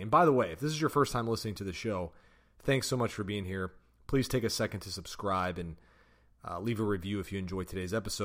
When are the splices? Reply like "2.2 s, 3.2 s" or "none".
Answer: none